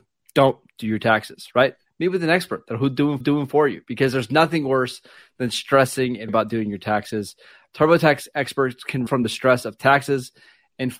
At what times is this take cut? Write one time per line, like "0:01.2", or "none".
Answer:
0:03.2
0:06.3
0:09.1